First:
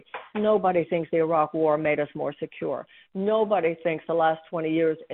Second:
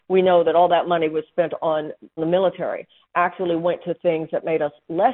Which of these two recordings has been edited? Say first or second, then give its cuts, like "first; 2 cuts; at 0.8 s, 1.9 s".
second; 1 cut; at 2.2 s